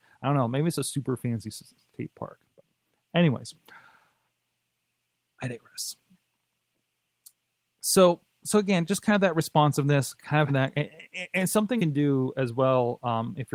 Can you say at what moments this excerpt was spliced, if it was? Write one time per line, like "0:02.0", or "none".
0:08.3
0:10.5
0:11.8